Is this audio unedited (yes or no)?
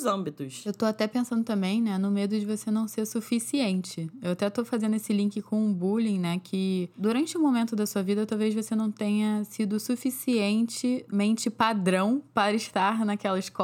yes